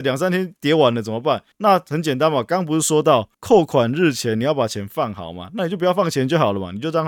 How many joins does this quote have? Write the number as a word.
two